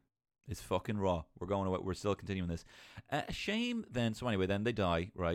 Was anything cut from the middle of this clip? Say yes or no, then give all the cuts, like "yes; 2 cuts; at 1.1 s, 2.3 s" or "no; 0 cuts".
yes; 1 cut; at 3.9 s